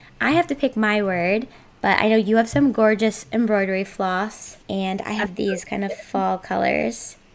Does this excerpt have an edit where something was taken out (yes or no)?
yes